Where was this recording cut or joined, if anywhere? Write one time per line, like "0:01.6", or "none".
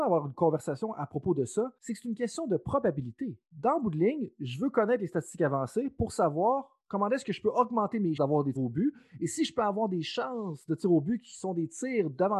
0:01.8
0:03.4
0:08.2
0:08.6